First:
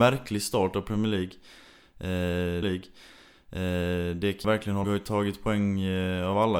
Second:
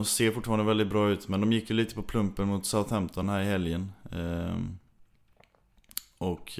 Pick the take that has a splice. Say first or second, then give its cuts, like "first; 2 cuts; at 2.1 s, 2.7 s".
first; 3 cuts; at 2.6 s, 4.4 s, 4.8 s